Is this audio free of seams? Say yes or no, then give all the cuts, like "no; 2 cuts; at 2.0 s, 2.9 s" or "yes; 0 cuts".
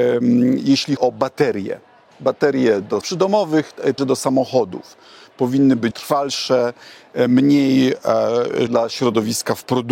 no; 5 cuts; at 1.0 s, 3.0 s, 4.0 s, 5.9 s, 8.7 s